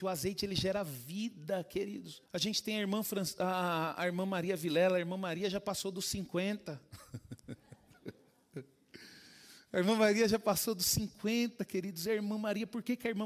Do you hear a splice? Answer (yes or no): yes